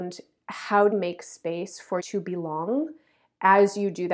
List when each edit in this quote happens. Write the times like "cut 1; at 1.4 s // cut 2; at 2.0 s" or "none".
cut 1; at 0.9 s // cut 2; at 2.0 s

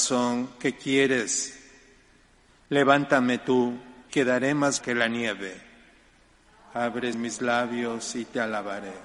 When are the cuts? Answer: cut 1; at 4.1 s // cut 2; at 4.8 s // cut 3; at 7.1 s

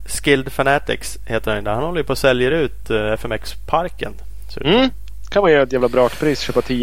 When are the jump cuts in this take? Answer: none

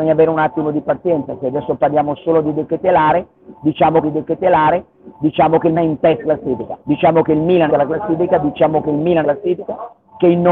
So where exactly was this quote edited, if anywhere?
cut 1; at 4.0 s // cut 2; at 5.7 s // cut 3; at 6.2 s // cut 4; at 6.8 s // cut 5; at 7.7 s // cut 6; at 9.2 s

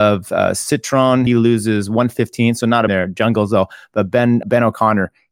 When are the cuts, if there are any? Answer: cut 1; at 1.3 s // cut 2; at 2.9 s // cut 3; at 4.4 s

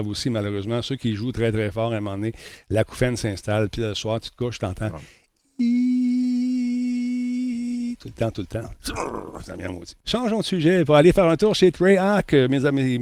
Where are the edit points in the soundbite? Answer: cut 1; at 10.0 s

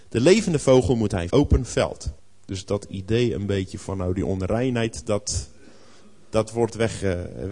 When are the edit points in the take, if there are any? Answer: cut 1; at 1.3 s // cut 2; at 2.2 s

